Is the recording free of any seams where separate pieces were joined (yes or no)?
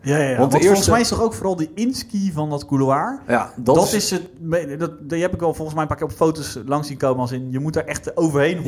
yes